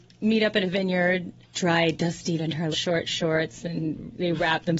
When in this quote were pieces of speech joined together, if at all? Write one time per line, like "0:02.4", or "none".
0:01.4
0:02.4
0:02.7

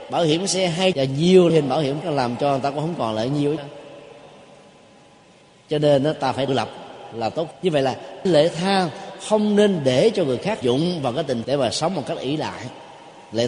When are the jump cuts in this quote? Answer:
0:00.9
0:01.5
0:02.0
0:03.6
0:06.5
0:07.5
0:08.3
0:10.6
0:11.4

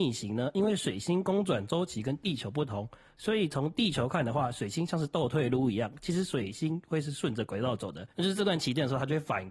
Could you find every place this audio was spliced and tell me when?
0:08.1

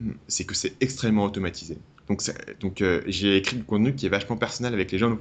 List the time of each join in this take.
none

